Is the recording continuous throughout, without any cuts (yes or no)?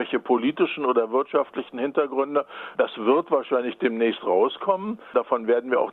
yes